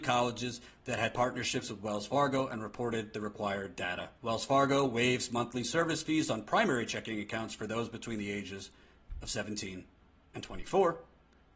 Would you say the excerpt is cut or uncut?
cut